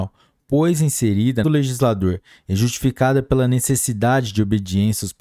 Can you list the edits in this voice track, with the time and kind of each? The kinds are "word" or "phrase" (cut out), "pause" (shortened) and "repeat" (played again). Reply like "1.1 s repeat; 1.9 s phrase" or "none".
1.4 s phrase

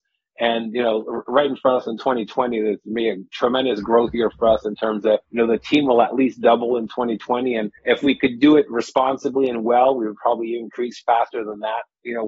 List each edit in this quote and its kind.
5.2 s pause; 7.8 s pause

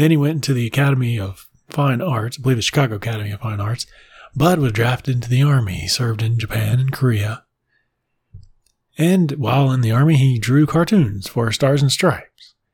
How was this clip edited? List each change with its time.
none

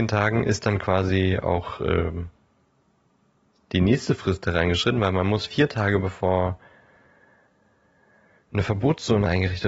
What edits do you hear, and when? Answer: none

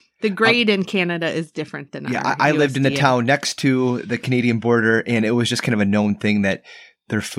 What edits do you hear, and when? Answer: none

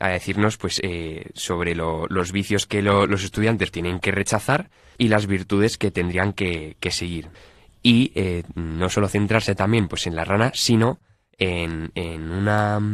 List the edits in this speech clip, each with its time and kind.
3.7 s word

